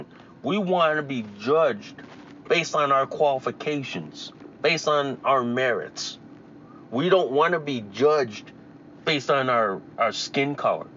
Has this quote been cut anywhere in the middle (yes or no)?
no